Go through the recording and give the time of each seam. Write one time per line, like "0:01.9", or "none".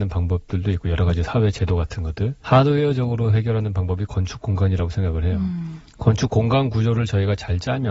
0:02.4